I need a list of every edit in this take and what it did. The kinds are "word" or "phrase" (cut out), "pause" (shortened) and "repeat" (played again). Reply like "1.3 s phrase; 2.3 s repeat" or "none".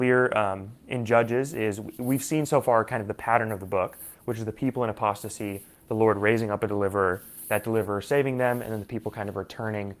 none